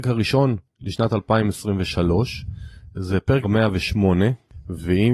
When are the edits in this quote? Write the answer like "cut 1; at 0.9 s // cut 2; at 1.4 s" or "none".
cut 1; at 3.4 s